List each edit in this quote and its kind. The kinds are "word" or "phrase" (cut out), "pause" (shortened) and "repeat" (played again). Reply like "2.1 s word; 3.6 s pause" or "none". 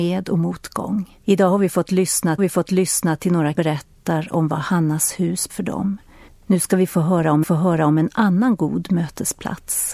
1.2 s pause; 2.4 s repeat; 3.5 s phrase; 5.5 s word; 6.3 s pause; 7.4 s repeat